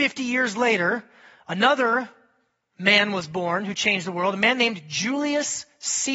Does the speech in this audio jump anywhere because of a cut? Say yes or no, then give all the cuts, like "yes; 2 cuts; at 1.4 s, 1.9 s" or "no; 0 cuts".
no; 0 cuts